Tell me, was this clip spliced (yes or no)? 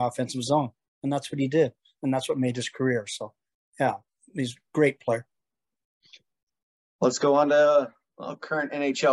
no